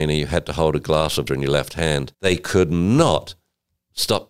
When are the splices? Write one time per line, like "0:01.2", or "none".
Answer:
0:01.3
0:02.1